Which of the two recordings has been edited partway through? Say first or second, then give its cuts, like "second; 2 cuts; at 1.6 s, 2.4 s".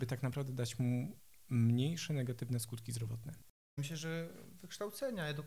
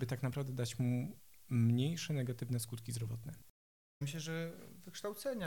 first; 1 cut; at 3.5 s